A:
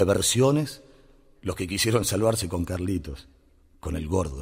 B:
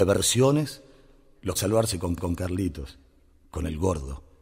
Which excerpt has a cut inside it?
B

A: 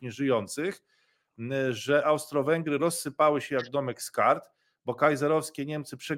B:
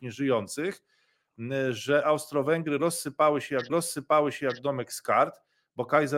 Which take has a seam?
B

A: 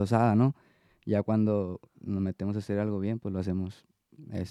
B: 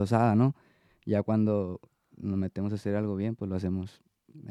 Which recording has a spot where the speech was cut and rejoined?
A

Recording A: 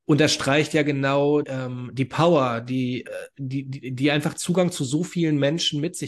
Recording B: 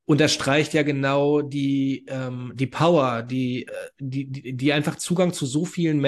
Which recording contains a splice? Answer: A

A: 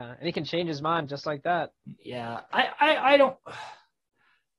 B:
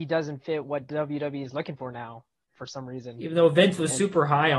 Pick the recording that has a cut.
A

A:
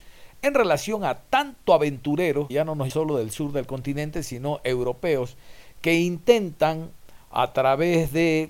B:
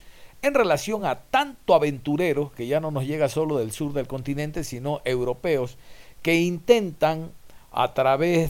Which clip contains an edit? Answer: A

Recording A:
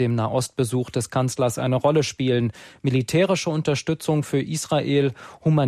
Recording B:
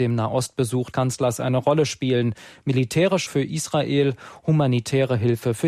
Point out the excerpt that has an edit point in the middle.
B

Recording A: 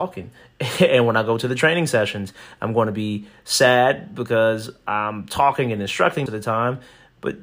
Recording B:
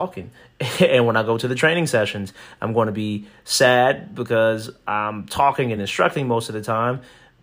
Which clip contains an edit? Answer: A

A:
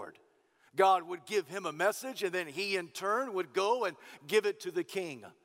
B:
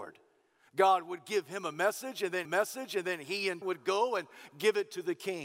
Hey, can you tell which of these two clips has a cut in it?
B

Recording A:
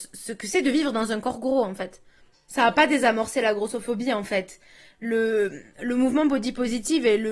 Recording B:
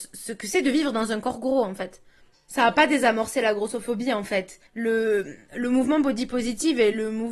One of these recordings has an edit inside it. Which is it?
B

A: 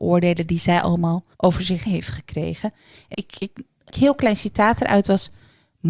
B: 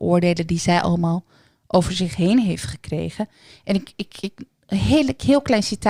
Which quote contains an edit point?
A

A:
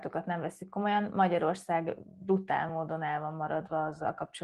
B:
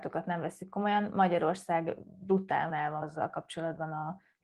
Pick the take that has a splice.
B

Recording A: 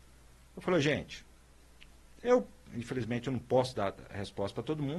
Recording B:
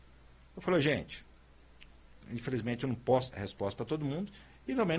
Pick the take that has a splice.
B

